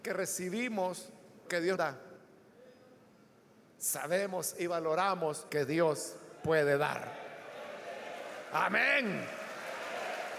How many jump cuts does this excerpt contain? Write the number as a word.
three